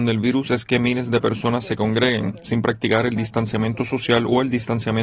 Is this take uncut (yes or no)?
yes